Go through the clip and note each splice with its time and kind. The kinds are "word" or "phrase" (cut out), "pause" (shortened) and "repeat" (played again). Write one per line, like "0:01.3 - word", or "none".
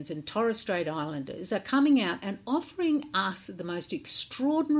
none